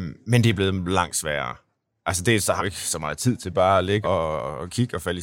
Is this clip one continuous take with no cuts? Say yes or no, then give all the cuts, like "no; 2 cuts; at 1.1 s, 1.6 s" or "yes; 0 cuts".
no; 2 cuts; at 2.6 s, 4.0 s